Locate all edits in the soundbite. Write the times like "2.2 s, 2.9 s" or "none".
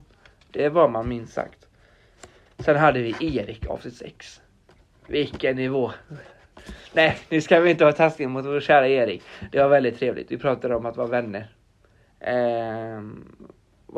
none